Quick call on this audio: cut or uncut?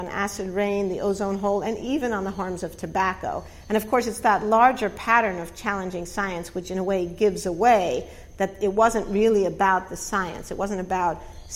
uncut